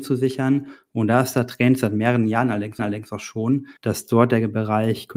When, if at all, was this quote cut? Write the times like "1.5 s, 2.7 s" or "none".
2.8 s, 3.8 s